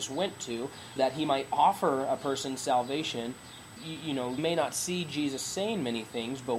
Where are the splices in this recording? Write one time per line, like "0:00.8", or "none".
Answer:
0:01.0
0:03.8
0:04.4